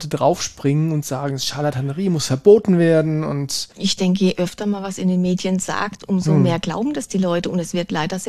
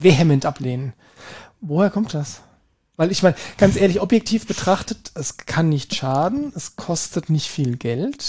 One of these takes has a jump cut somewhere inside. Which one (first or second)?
first